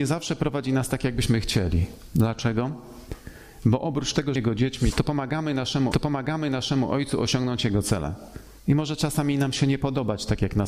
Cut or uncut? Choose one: cut